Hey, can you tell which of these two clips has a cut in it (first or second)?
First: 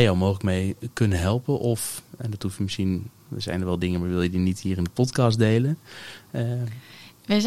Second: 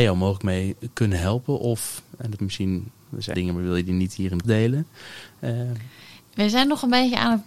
second